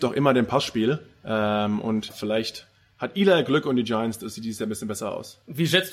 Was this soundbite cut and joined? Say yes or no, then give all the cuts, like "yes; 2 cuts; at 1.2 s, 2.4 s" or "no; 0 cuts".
yes; 1 cut; at 2.1 s